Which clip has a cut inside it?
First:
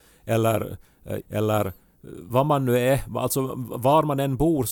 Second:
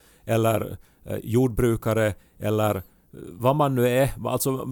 first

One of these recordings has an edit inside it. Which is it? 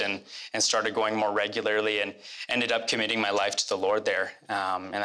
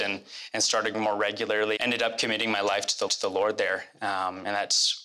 second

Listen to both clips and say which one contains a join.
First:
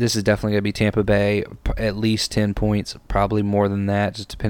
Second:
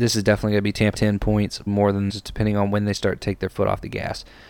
second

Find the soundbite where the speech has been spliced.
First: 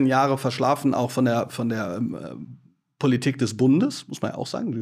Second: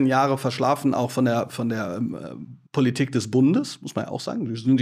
second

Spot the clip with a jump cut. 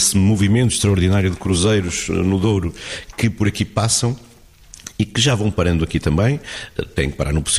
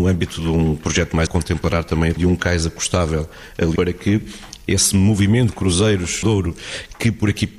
second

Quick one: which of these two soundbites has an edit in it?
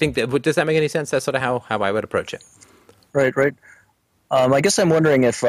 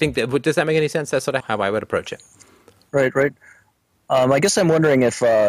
second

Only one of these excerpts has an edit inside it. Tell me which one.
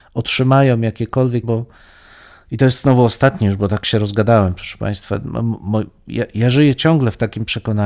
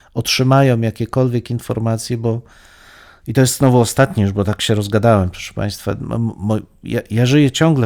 first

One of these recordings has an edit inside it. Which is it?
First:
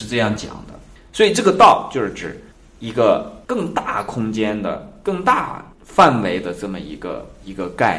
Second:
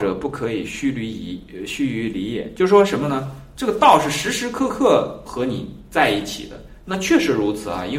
first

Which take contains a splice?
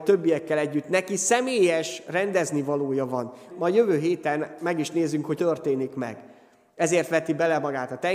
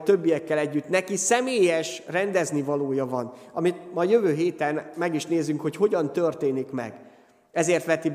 first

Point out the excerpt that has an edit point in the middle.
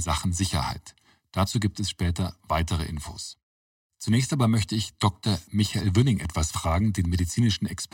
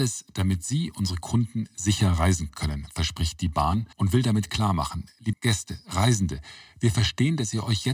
second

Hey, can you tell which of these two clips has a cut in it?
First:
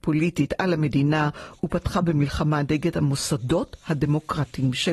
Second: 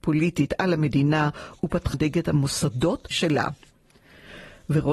second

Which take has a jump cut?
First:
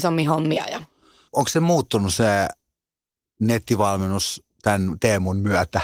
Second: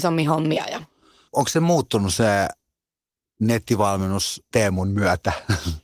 second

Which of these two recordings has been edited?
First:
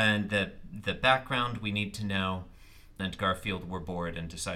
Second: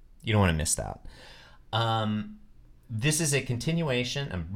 first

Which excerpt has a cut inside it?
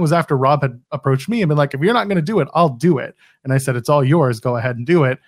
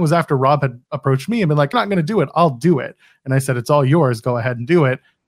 second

